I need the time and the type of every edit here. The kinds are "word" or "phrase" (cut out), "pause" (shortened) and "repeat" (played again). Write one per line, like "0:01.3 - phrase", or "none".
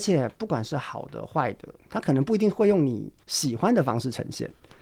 0:03.2 - pause